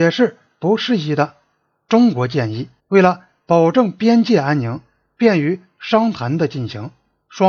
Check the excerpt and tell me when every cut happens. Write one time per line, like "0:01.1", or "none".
0:02.8